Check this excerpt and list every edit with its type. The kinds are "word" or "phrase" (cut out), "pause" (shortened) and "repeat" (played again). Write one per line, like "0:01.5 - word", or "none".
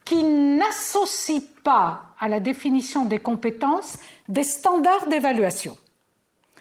none